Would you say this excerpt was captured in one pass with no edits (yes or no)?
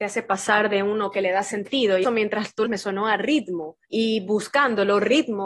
no